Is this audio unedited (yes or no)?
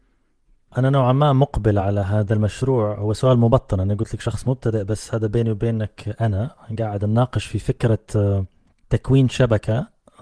yes